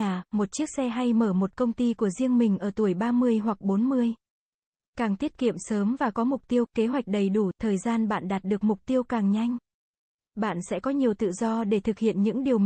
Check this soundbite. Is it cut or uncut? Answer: uncut